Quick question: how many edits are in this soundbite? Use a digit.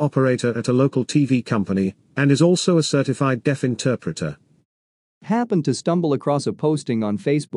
0